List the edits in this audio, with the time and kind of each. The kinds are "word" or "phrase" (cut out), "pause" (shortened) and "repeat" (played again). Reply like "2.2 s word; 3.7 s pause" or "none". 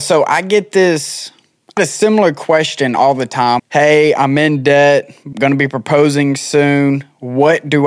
1.8 s word; 3.6 s word; 5.3 s word